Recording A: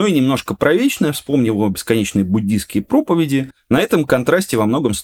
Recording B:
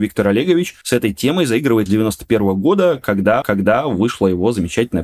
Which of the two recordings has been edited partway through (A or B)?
B